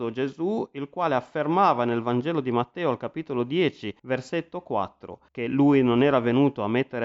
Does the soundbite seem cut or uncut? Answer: cut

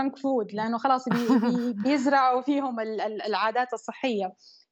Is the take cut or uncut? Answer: uncut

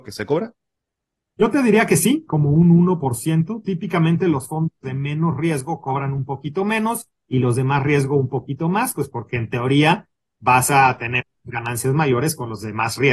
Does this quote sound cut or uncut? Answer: uncut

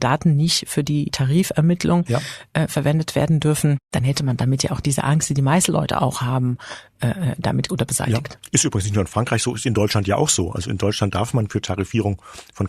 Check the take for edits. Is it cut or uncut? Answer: cut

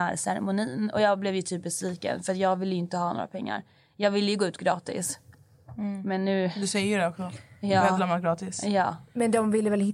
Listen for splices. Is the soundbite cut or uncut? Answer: uncut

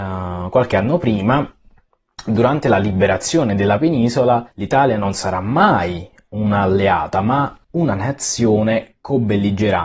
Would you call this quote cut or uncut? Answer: cut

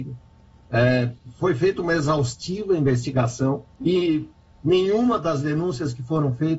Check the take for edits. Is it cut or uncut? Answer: cut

